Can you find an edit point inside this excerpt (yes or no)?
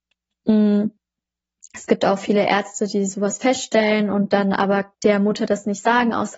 yes